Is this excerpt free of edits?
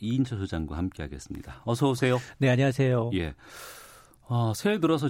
yes; 0 cuts

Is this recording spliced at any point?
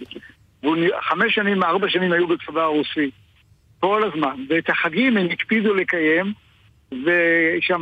no; 0 cuts

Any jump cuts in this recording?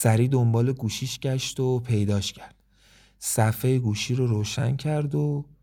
no; 0 cuts

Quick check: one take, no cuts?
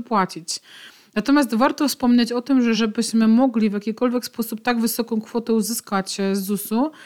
yes; 0 cuts

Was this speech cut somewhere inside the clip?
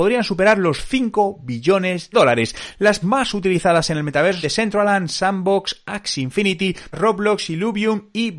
yes; 4 cuts; at 2.1 s, 3.0 s, 4.4 s, 6.9 s

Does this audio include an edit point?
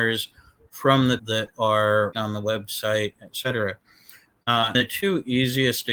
yes; 3 cuts; at 1.2 s, 2.1 s, 4.7 s

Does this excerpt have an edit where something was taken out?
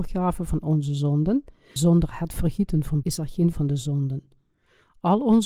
yes; 3 cuts; at 1.8 s, 3.0 s, 3.5 s

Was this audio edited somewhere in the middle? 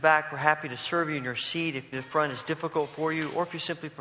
yes; 1 cut; at 1.9 s

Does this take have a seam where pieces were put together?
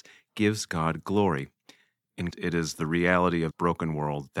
yes; 2 cuts; at 2.3 s, 3.5 s

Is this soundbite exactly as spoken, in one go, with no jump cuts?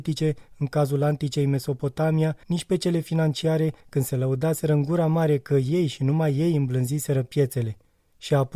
no; 2 cuts; at 2.4 s, 3.8 s

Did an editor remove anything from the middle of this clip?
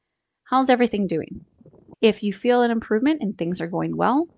no; 0 cuts

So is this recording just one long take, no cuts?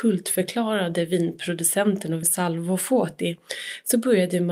no; 1 cut; at 2.2 s

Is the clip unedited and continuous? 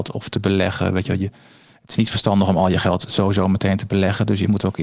yes; 0 cuts

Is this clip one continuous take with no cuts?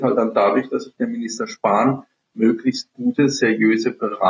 yes; 0 cuts

